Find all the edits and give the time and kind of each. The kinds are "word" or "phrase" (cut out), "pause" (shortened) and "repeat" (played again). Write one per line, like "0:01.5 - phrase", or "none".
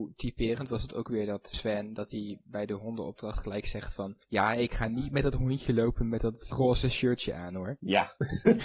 0:04.2 - pause